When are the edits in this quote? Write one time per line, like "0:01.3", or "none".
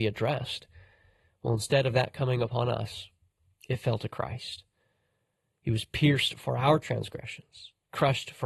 none